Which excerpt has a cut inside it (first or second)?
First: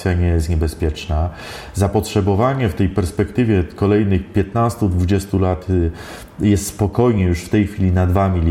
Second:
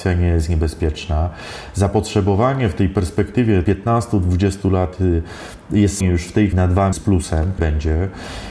second